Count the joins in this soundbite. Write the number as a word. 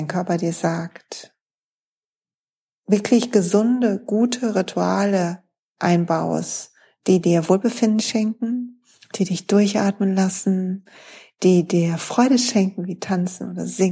one